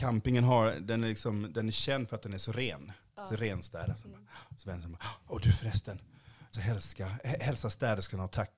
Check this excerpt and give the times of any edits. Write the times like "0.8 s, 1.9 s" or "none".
6.5 s